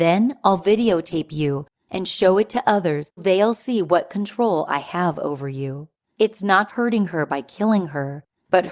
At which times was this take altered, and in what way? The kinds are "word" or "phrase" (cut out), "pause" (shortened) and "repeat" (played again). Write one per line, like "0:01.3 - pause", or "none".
0:03.2 - word
0:06.7 - word